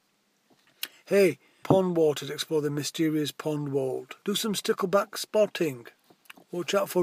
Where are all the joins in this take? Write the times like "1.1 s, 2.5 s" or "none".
1.6 s, 4.2 s